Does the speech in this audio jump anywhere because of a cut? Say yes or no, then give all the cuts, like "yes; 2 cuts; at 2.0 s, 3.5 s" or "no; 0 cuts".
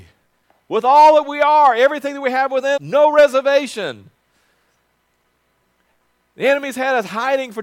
yes; 1 cut; at 2.8 s